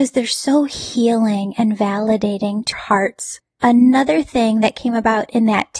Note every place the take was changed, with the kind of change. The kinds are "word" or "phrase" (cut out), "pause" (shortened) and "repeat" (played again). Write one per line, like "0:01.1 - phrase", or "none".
0:02.7 - word